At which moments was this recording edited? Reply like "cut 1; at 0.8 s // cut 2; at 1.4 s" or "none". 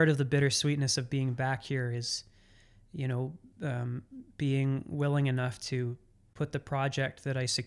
none